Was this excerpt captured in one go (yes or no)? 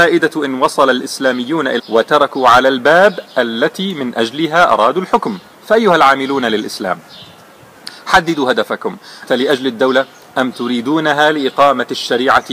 no